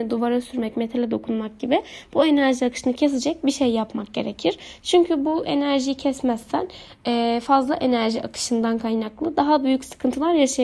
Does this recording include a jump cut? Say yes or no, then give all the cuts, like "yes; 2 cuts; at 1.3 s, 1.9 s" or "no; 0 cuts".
no; 0 cuts